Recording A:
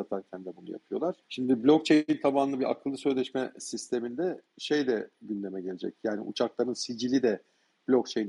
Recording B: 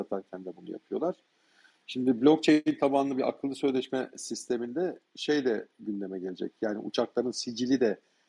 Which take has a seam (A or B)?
A